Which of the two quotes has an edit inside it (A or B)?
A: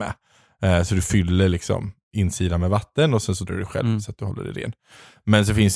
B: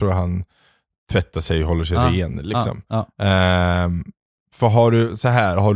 A